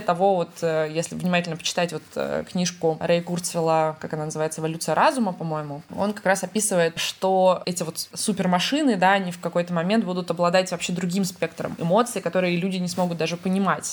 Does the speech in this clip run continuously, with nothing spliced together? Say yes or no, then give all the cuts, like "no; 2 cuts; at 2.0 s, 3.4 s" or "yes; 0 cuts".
yes; 0 cuts